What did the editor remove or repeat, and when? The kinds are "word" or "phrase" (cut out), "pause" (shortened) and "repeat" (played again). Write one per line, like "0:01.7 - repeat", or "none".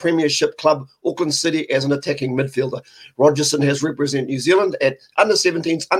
none

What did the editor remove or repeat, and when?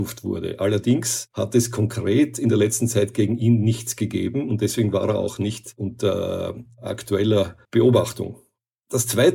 0:07.6 - pause

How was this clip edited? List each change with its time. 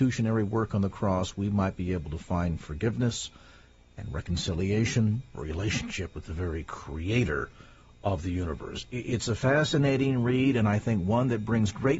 0:05.3 - phrase

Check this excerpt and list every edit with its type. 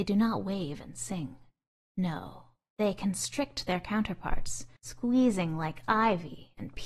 0:04.8 - pause

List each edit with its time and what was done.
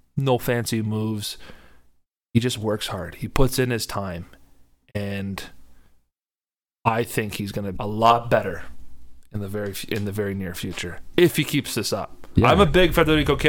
0:07.7 - word

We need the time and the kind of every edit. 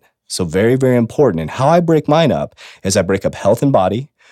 none

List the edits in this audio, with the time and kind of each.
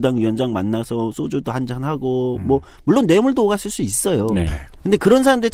none

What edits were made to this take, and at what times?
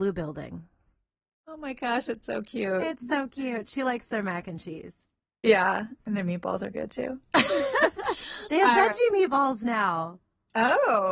0:06.0 - pause

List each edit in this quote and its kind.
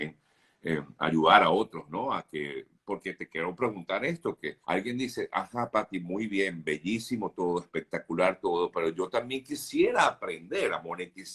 0:04.6 - pause

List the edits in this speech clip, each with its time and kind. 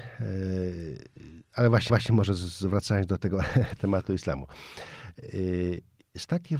0:01.9 - repeat

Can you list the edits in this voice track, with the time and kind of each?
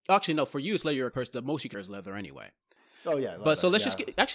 0:01.1 - word
0:01.7 - word

